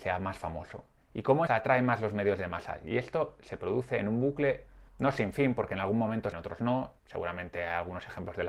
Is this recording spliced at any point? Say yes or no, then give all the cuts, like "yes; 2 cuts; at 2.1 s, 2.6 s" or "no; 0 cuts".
yes; 4 cuts; at 1.5 s, 4.9 s, 6.3 s, 7.0 s